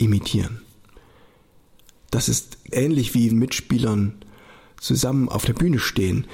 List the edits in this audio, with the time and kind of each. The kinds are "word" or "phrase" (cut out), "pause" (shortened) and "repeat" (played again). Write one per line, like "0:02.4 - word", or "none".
0:02.7 - word
0:03.3 - phrase